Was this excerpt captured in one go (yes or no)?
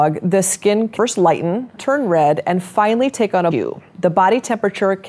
no